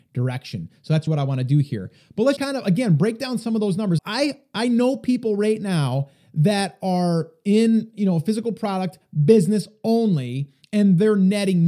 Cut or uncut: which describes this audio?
cut